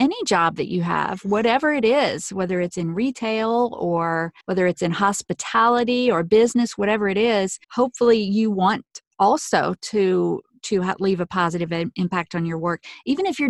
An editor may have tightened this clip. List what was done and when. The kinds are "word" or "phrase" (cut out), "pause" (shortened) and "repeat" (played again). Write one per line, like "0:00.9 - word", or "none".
0:04.4 - pause
0:07.6 - pause